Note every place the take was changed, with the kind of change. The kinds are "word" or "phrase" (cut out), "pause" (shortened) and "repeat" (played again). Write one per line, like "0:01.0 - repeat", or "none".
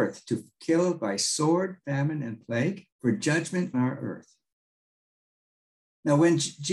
0:02.9 - pause
0:03.7 - word